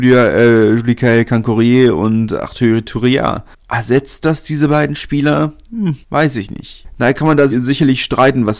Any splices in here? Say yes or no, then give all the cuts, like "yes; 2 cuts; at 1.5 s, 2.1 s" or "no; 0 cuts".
yes; 2 cuts; at 6.0 s, 7.5 s